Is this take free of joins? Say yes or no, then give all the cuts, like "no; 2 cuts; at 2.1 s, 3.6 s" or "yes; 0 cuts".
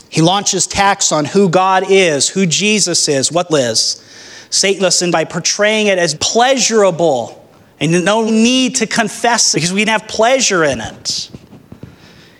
no; 6 cuts; at 3.5 s, 4.8 s, 5.1 s, 6.1 s, 8.3 s, 9.5 s